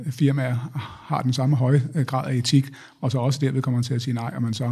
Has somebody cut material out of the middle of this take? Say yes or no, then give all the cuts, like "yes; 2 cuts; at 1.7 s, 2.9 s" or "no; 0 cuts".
no; 0 cuts